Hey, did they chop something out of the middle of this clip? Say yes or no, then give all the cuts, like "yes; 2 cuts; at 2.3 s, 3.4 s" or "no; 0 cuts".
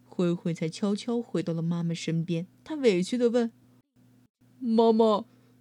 yes; 2 cuts; at 2.5 s, 3.6 s